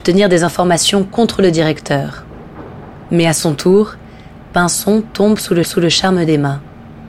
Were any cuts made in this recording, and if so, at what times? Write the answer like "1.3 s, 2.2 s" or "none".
5.6 s